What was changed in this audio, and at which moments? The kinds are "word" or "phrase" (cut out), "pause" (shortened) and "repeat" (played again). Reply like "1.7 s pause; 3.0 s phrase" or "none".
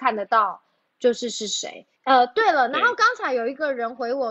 1.9 s pause